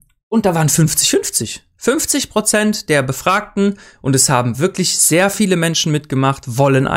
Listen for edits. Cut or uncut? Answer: uncut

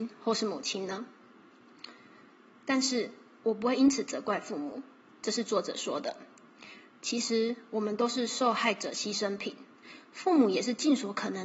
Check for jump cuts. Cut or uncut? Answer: uncut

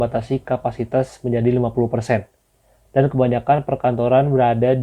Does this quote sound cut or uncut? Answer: uncut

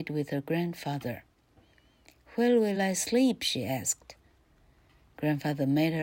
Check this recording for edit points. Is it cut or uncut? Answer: uncut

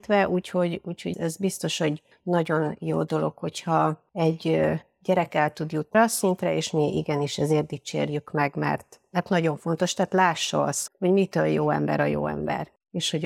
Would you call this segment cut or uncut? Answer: cut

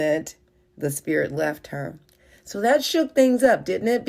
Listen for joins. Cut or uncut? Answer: uncut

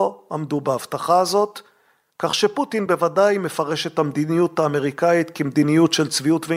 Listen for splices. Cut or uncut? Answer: uncut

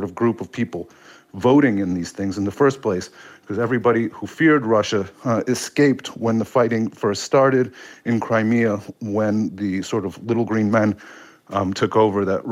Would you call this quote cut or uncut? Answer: uncut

